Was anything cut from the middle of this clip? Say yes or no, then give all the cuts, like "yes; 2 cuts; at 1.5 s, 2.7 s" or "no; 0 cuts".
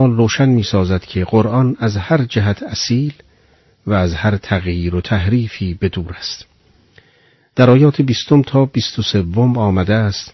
no; 0 cuts